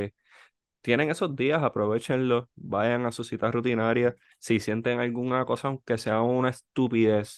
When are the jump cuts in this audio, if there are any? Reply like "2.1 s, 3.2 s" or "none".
none